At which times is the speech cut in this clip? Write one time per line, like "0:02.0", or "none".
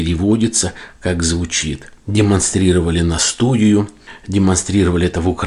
none